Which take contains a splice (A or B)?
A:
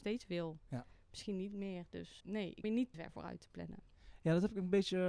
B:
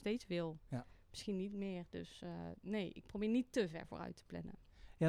A